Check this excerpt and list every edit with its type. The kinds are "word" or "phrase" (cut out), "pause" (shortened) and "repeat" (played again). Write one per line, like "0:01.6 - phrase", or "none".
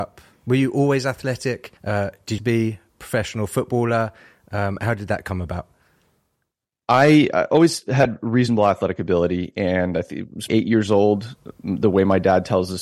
0:01.8 - pause
0:02.4 - phrase
0:10.5 - word